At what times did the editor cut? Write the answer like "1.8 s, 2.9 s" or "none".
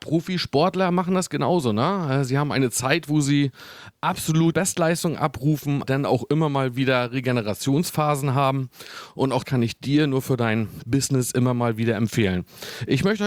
4.5 s, 5.8 s, 9.4 s

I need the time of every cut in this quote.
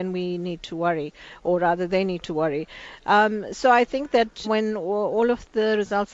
4.4 s

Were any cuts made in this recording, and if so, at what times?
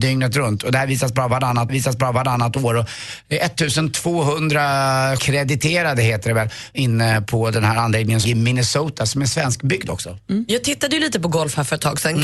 1.7 s, 5.2 s, 6.7 s, 8.2 s

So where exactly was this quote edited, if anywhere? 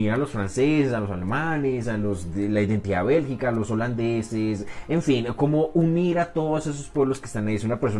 none

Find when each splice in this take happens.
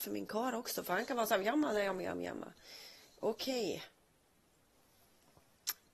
none

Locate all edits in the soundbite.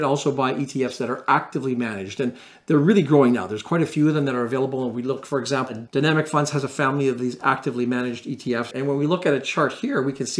none

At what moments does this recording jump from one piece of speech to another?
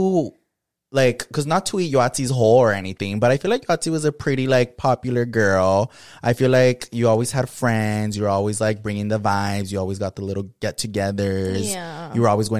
none

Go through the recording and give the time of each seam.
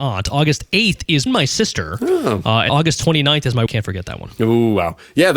1.3 s, 2.7 s, 3.7 s

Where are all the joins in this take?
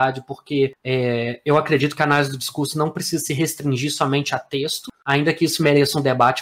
none

